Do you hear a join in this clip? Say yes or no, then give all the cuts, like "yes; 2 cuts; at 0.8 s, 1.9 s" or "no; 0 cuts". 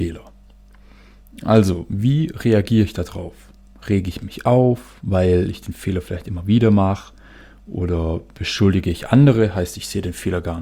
no; 0 cuts